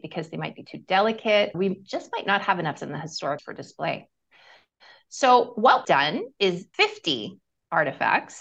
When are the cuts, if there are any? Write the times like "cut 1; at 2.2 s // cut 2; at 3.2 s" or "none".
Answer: cut 1; at 1.5 s // cut 2; at 2.8 s // cut 3; at 3.4 s // cut 4; at 5.8 s // cut 5; at 6.7 s